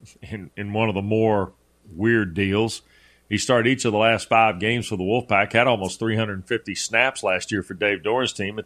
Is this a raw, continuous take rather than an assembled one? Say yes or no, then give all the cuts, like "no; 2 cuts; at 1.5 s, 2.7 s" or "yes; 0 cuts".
yes; 0 cuts